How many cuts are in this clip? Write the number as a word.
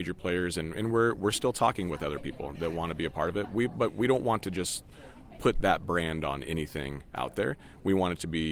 zero